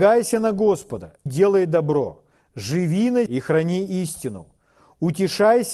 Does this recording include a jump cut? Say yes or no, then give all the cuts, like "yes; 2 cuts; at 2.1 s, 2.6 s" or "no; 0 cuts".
yes; 2 cuts; at 1.3 s, 3.3 s